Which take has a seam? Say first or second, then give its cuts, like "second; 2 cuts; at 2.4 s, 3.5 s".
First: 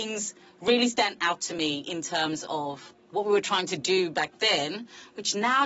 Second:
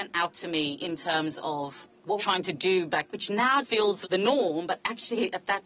second; 4 cuts; at 2.2 s, 3.1 s, 3.6 s, 4.0 s